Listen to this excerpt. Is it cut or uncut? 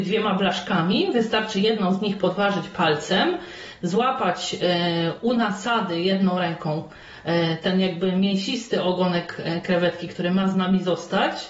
uncut